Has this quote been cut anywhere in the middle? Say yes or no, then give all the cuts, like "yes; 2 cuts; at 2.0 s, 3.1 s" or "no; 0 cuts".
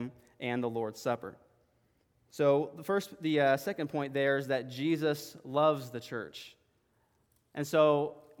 yes; 1 cut; at 2.0 s